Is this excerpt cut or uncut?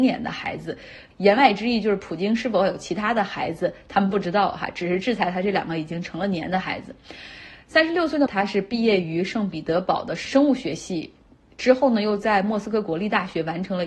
cut